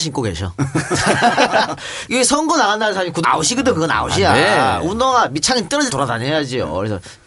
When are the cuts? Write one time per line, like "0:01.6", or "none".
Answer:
0:02.1
0:03.2
0:05.9